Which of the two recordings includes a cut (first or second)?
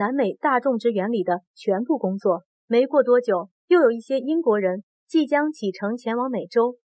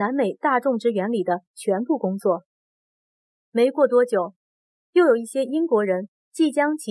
first